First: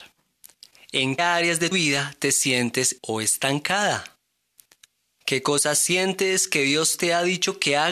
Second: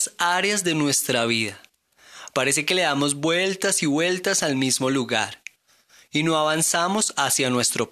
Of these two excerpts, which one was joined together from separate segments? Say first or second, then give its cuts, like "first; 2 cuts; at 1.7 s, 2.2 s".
first; 4 cuts; at 1.2 s, 1.7 s, 3.0 s, 4.8 s